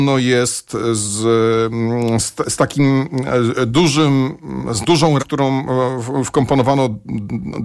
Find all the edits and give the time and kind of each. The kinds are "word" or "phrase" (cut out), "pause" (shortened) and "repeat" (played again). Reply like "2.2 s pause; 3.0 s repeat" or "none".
2.5 s word; 5.2 s word